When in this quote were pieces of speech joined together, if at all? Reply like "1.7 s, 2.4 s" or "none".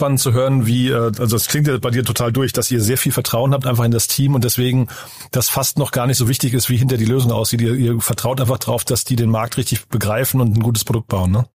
none